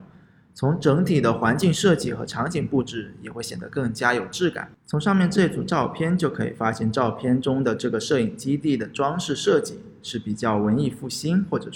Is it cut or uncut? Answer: cut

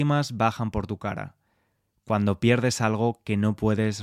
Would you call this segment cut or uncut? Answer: uncut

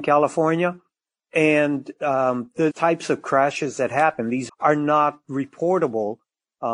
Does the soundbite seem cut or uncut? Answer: cut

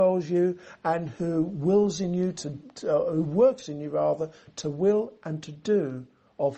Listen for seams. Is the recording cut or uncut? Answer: uncut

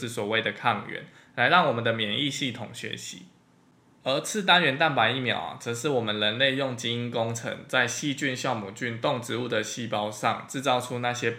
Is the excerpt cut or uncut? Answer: uncut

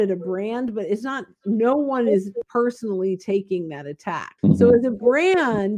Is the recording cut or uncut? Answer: cut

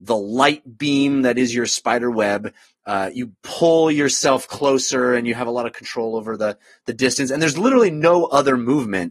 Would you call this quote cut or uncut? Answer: uncut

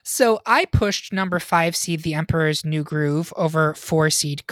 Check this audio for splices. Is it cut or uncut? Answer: uncut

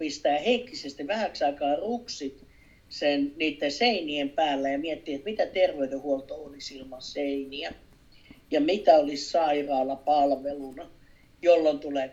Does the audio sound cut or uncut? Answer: uncut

